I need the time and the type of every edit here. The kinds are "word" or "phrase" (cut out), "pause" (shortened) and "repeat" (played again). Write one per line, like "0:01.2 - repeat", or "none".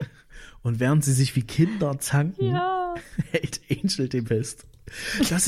0:04.2 - word